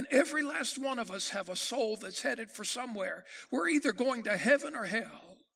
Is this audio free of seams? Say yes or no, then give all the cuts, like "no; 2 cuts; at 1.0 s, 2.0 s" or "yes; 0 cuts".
yes; 0 cuts